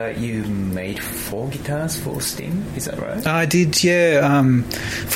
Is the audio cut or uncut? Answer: uncut